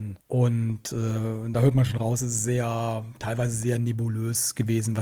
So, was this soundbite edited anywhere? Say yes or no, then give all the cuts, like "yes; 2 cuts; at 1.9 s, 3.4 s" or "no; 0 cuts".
no; 0 cuts